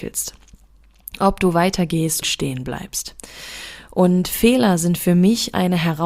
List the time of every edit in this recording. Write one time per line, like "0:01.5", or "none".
0:02.2